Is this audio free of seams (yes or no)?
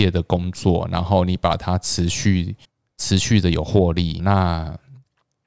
no